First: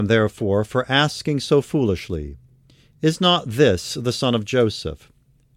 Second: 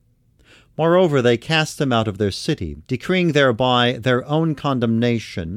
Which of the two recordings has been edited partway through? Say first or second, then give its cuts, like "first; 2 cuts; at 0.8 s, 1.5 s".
second; 1 cut; at 2.8 s